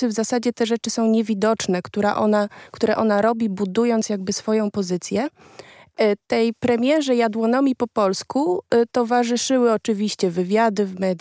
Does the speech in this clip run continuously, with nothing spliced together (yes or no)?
yes